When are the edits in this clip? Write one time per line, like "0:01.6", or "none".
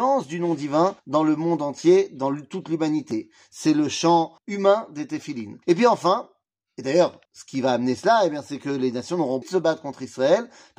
0:01.0
0:04.4
0:05.6
0:07.2
0:09.4